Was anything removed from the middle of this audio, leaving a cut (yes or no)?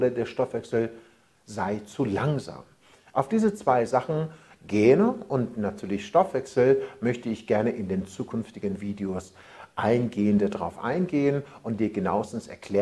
no